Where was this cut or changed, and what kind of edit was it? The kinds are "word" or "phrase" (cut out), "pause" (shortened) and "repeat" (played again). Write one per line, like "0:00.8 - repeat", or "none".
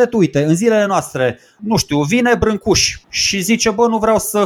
0:01.6 - word
0:03.0 - pause